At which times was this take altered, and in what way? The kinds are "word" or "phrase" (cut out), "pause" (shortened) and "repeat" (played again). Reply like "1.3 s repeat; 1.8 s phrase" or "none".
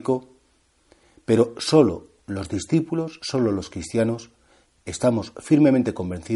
none